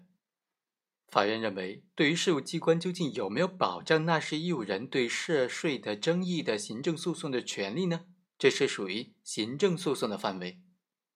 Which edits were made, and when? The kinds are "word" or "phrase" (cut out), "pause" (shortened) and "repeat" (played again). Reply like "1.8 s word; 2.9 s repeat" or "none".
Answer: 8.3 s pause

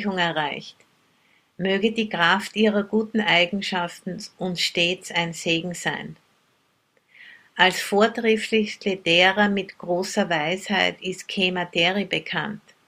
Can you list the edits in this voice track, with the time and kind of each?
none

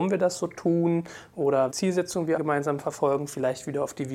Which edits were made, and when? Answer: 1.7 s word; 2.4 s word

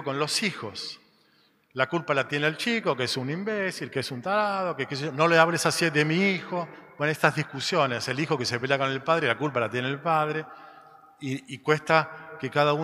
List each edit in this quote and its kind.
none

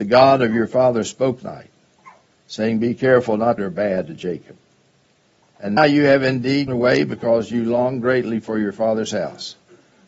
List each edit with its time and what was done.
1.4 s phrase; 3.6 s phrase; 5.8 s word; 6.7 s word

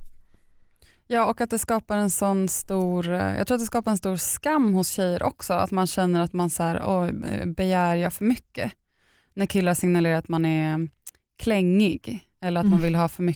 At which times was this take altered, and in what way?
none

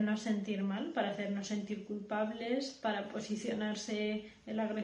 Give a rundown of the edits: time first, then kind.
none

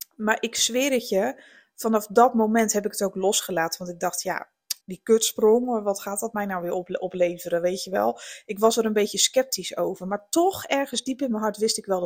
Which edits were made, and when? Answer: 4.8 s pause

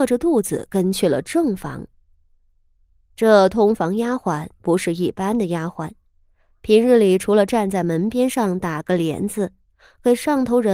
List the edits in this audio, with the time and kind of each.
none

